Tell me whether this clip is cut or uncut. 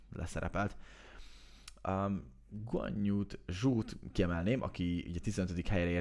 uncut